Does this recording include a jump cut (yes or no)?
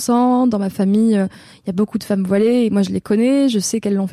no